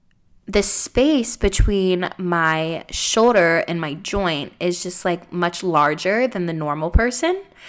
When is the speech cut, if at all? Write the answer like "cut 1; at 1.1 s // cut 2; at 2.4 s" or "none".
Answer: none

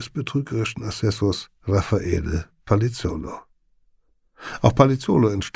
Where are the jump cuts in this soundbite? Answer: cut 1; at 1.6 s

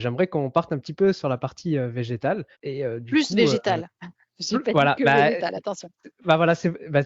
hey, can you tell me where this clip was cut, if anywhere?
cut 1; at 2.5 s

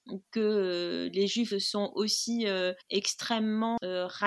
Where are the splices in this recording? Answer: cut 1; at 1.5 s // cut 2; at 2.8 s

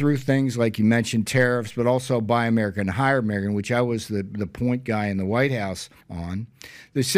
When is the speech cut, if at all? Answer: cut 1; at 6.0 s

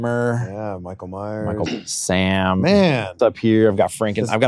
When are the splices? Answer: cut 1; at 1.7 s // cut 2; at 3.2 s

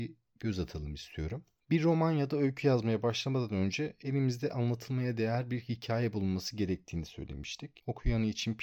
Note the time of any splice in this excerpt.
none

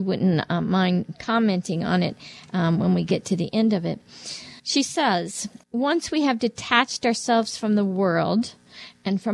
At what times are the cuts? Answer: cut 1; at 4.6 s // cut 2; at 5.6 s

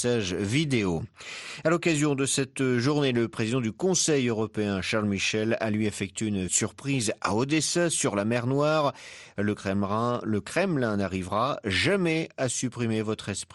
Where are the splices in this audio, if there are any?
cut 1; at 6.5 s

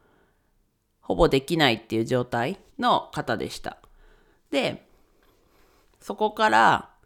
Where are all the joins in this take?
cut 1; at 2.7 s

